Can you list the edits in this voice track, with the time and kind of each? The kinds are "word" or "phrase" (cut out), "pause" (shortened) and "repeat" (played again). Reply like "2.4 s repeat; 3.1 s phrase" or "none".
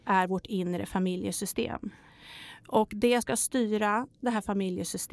3.2 s word